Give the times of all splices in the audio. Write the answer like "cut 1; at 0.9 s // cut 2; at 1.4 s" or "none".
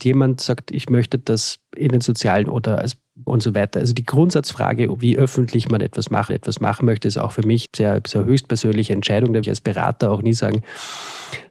cut 1; at 2.4 s // cut 2; at 3.3 s // cut 3; at 6.3 s // cut 4; at 7.7 s // cut 5; at 9.4 s